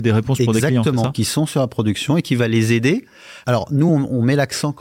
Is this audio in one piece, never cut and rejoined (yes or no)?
yes